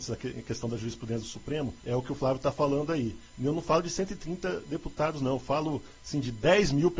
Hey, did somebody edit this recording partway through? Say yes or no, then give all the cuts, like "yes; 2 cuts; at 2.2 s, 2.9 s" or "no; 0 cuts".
yes; 1 cut; at 1.8 s